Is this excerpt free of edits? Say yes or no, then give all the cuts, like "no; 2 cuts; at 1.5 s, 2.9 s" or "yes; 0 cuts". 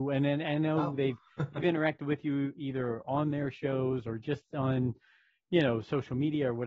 yes; 0 cuts